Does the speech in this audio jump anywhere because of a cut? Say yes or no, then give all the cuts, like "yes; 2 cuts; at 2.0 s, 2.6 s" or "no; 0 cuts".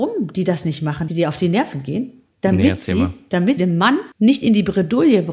yes; 3 cuts; at 1.1 s, 3.6 s, 4.1 s